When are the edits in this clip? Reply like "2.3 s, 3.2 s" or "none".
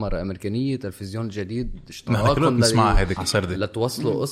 3.2 s